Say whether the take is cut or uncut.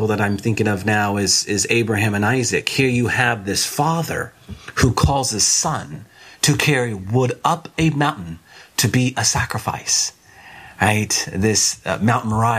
uncut